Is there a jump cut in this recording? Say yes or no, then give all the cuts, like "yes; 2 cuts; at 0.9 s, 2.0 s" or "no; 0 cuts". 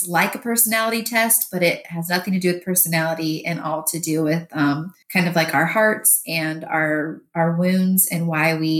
yes; 1 cut; at 5.0 s